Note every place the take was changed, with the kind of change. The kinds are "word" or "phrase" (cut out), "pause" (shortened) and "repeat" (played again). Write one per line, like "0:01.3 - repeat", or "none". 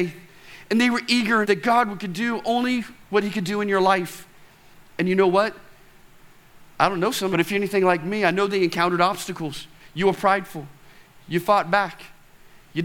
0:01.4 - phrase
0:03.0 - pause
0:07.3 - phrase